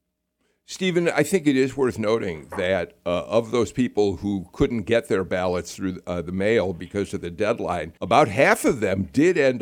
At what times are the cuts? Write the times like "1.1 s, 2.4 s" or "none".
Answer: 8.0 s